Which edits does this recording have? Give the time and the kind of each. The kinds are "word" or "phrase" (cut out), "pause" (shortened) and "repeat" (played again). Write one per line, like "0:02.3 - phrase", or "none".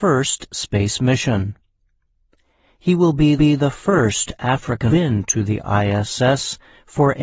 0:03.4 - repeat
0:04.9 - phrase